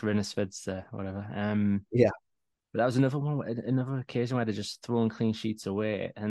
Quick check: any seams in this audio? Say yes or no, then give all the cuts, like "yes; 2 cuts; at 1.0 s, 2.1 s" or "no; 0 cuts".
no; 0 cuts